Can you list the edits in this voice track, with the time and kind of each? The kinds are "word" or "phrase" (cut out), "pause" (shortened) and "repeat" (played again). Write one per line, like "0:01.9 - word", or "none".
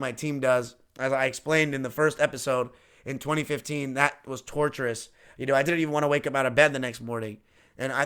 none

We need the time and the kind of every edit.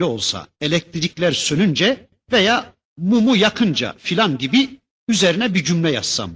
none

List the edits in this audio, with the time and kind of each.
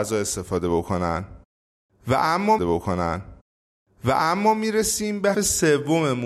0:02.6 - repeat
0:05.3 - word

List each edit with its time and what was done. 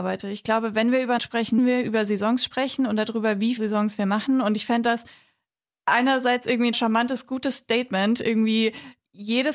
0:01.2 - word
0:01.6 - word
0:03.6 - word
0:06.7 - word

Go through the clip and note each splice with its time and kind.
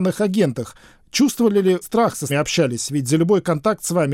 0:01.8 - word
0:02.3 - phrase

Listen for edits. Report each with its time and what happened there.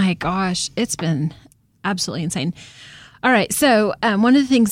none

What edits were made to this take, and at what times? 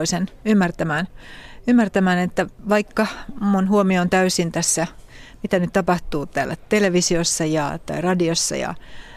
none

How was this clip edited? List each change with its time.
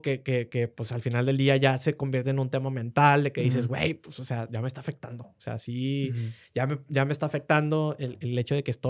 none

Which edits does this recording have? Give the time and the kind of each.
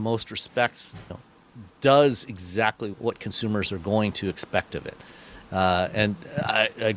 0:01.1 - word
0:02.9 - word

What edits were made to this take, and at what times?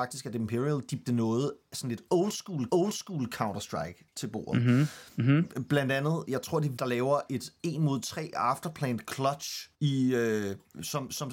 0:01.1 - word
0:02.7 - repeat
0:06.8 - word
0:09.7 - pause

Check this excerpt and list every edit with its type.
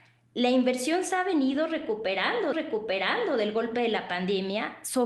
0:02.5 - repeat

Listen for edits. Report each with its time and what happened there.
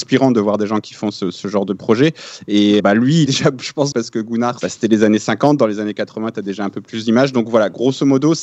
0:02.8 - word
0:03.3 - word
0:03.9 - phrase
0:04.6 - phrase

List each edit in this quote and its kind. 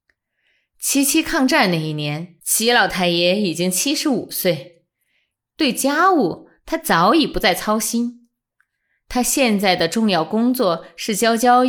0:02.4 - pause

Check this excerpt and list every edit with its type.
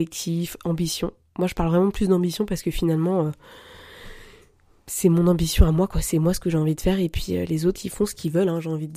none

